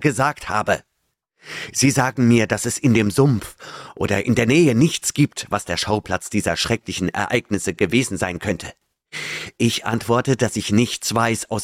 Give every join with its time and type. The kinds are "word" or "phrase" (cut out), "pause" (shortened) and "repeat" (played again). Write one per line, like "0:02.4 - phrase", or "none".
none